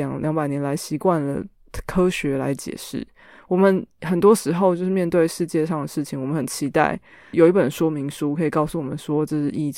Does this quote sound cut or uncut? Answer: cut